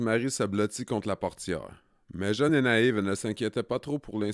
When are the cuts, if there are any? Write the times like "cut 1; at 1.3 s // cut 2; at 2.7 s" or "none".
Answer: none